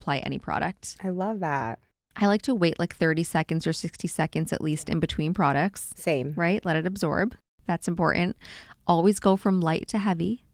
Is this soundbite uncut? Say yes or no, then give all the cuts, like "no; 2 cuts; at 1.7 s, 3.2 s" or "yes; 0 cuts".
yes; 0 cuts